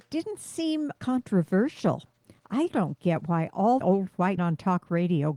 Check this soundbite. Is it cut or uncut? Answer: cut